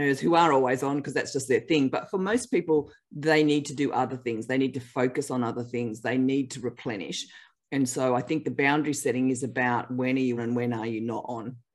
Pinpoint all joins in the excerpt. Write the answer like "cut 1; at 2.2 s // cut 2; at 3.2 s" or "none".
cut 1; at 10.4 s